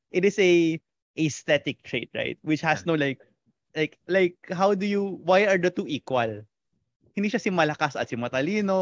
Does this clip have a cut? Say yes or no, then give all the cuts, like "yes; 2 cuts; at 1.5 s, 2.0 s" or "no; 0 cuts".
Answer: no; 0 cuts